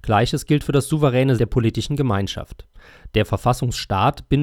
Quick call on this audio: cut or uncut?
cut